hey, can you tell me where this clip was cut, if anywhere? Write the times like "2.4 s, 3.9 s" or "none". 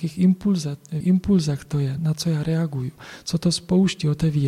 1.0 s, 2.0 s